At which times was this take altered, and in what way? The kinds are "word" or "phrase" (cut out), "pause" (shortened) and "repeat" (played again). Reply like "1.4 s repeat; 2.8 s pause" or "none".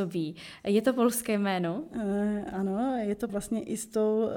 3.3 s word